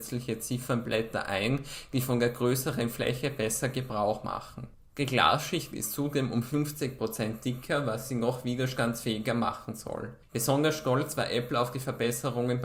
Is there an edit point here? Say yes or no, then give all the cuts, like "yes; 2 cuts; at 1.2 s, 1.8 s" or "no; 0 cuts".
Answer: no; 0 cuts